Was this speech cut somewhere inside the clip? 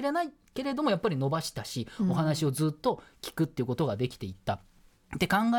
no; 0 cuts

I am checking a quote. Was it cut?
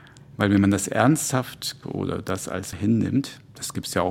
yes; 2 cuts; at 1.8 s, 2.7 s

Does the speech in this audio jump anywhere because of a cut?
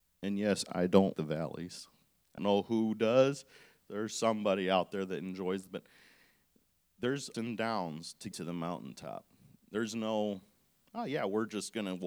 yes; 5 cuts; at 1.1 s, 2.4 s, 5.7 s, 7.3 s, 8.3 s

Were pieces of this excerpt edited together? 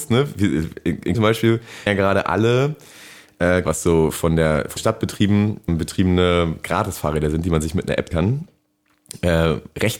yes; 6 cuts; at 1.1 s, 1.9 s, 3.6 s, 4.8 s, 5.7 s, 8.1 s

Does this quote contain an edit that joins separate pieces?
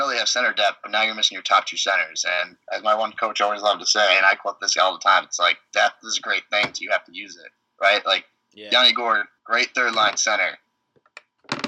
yes; 2 cuts; at 2.6 s, 9.4 s

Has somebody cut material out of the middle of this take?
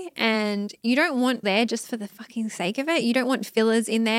yes; 1 cut; at 1.4 s

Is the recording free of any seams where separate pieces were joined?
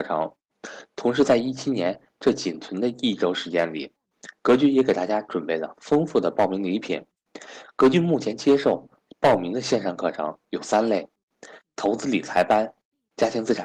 yes; 0 cuts

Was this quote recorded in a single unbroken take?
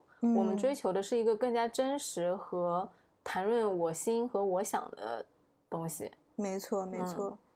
yes; 0 cuts

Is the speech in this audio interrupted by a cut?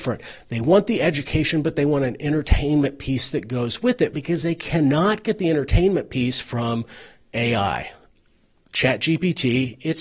no; 0 cuts

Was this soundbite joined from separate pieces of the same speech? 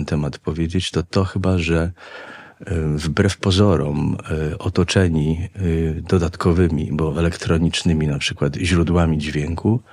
no; 0 cuts

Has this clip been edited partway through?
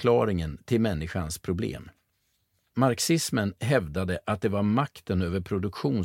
no; 0 cuts

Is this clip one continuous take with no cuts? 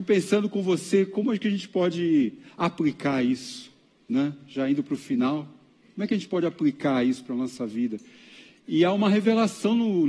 yes; 0 cuts

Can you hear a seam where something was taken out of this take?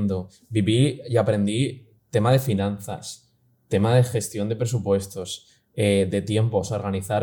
no; 0 cuts

